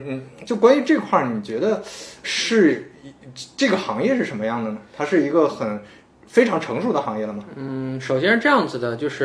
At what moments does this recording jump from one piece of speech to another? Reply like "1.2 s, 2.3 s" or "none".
2.2 s